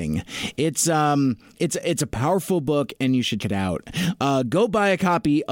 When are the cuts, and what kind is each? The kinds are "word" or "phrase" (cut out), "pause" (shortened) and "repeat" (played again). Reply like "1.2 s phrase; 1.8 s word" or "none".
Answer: 3.4 s word